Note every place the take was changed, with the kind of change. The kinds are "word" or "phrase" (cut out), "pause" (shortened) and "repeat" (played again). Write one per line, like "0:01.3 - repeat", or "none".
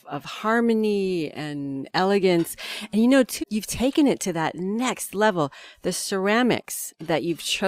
0:03.4 - word